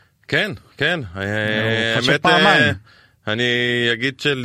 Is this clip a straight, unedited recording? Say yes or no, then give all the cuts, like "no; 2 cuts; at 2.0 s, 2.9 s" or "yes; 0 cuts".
yes; 0 cuts